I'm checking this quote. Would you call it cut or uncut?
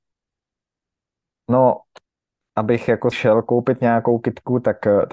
cut